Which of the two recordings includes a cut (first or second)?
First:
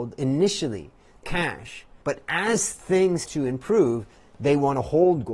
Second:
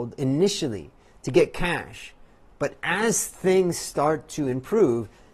first